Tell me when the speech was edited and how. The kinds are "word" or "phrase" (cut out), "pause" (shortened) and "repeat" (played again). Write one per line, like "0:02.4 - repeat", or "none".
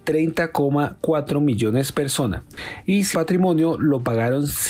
0:01.9 - word
0:03.1 - phrase